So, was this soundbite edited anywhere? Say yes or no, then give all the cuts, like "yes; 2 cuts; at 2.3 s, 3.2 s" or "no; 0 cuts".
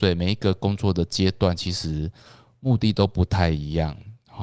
no; 0 cuts